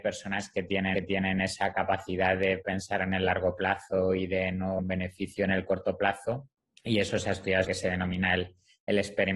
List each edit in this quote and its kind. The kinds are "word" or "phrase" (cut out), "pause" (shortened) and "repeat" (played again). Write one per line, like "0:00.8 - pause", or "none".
0:00.9 - repeat
0:04.8 - phrase
0:06.6 - pause
0:07.6 - phrase